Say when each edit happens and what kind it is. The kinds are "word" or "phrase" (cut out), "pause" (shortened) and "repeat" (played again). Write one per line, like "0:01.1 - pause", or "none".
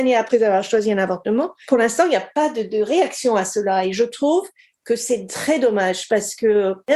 none